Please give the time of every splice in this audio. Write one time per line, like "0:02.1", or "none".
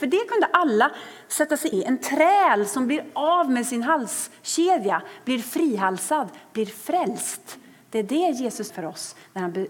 0:01.7
0:08.7

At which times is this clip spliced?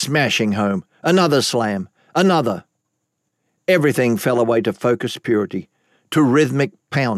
none

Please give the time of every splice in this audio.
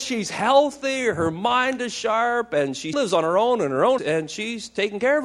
0:02.9
0:04.0

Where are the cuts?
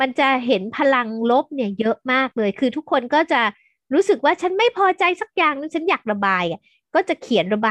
none

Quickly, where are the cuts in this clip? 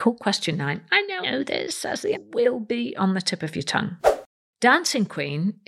0:01.2
0:02.1

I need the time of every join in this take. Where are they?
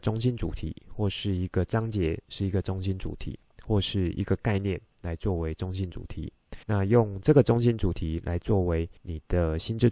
0:06.6
0:09.0

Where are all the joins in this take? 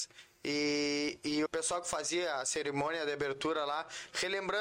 0:01.5

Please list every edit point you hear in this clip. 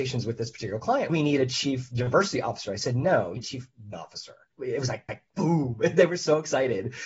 0:01.1
0:03.4
0:03.9
0:05.1

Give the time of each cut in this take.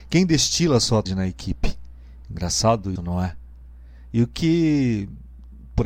0:01.1
0:03.0

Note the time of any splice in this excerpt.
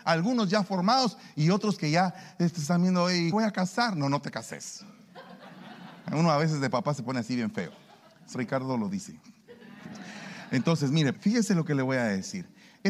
0:03.3
0:08.3
0:11.1

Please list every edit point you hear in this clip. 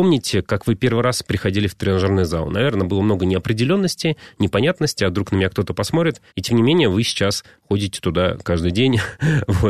0:06.3

